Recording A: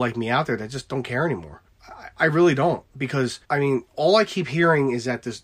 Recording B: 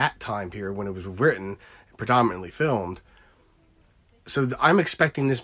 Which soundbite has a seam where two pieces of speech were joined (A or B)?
A